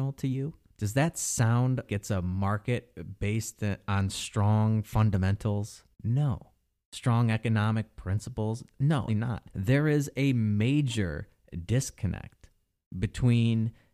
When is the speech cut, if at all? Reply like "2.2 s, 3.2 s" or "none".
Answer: 1.9 s, 5.9 s, 9.1 s, 9.5 s